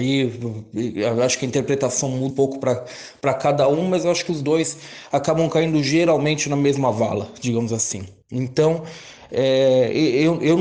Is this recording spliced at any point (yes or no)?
yes